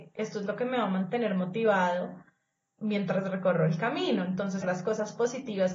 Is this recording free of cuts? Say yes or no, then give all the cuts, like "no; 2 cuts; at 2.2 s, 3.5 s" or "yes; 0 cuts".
no; 2 cuts; at 2.8 s, 4.6 s